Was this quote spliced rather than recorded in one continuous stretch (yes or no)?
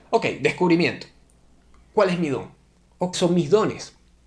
yes